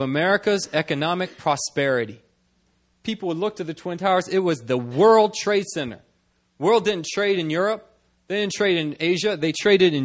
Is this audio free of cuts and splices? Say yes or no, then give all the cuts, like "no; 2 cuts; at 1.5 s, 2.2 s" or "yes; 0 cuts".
yes; 0 cuts